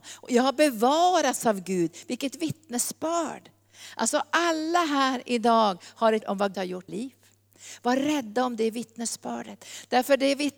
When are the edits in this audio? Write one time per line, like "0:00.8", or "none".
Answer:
0:06.2
0:06.5
0:06.9